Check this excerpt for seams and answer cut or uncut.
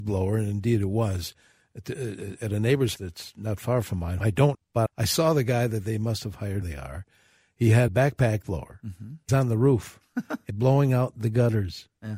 cut